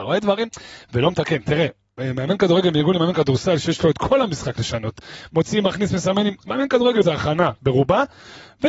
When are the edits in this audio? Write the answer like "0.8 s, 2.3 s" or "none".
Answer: 7.0 s